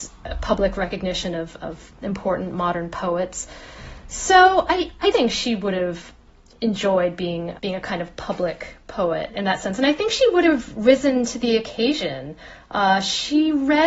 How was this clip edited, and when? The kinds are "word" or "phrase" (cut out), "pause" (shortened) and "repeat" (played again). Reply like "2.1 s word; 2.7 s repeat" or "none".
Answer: 5.1 s word; 7.6 s word